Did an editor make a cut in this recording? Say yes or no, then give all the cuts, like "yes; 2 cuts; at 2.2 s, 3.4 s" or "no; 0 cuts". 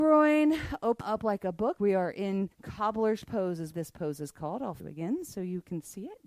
yes; 5 cuts; at 1.0 s, 1.8 s, 2.5 s, 3.7 s, 4.8 s